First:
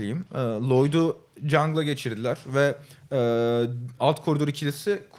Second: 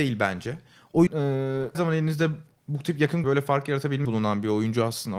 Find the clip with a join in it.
second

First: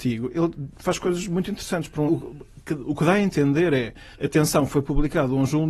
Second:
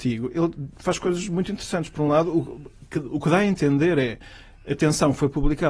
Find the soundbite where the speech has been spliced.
first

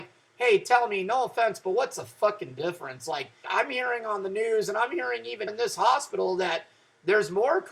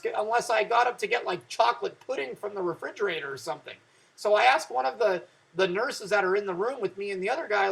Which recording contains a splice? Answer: first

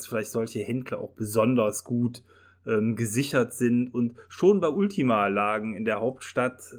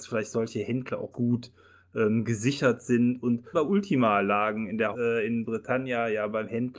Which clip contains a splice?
second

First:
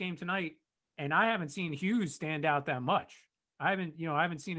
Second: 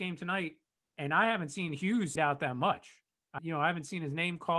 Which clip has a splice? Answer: second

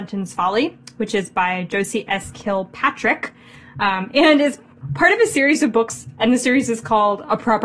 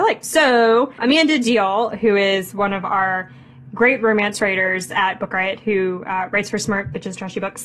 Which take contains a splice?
second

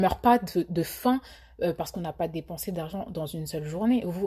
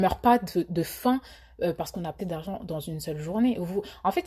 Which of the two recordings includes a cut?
second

